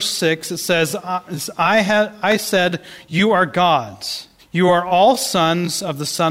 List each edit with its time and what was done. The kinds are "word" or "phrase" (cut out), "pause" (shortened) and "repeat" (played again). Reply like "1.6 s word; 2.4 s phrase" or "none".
4.4 s pause